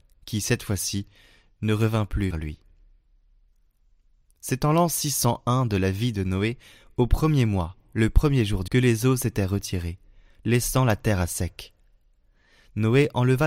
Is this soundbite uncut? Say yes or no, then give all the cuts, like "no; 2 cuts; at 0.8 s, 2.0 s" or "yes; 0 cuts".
no; 2 cuts; at 2.3 s, 8.7 s